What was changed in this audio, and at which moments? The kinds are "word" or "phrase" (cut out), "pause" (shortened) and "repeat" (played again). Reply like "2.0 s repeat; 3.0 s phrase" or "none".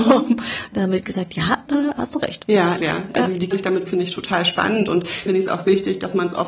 2.8 s word; 3.5 s word; 3.9 s word; 5.3 s word